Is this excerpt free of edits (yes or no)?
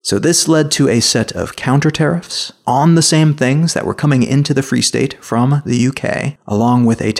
yes